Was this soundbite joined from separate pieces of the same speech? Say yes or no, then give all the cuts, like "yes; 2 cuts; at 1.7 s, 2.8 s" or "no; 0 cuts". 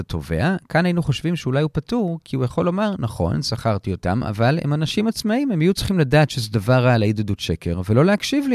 no; 0 cuts